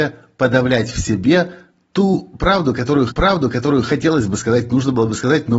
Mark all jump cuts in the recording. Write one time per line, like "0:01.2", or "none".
0:03.1